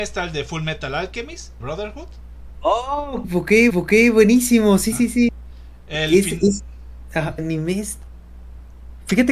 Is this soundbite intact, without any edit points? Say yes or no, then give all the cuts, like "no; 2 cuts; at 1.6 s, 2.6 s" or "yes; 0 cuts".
no; 5 cuts; at 1.6 s, 3.2 s, 3.7 s, 4.9 s, 7.4 s